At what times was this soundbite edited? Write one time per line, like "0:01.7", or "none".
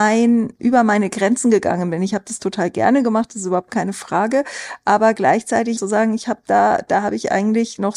0:05.8